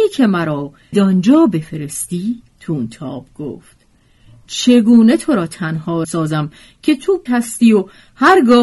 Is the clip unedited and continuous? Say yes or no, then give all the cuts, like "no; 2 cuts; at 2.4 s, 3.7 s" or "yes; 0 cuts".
no; 4 cuts; at 0.9 s, 2.5 s, 6.0 s, 7.3 s